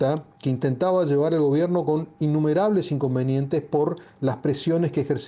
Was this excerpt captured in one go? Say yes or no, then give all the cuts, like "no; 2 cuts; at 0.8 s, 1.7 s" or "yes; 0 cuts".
yes; 0 cuts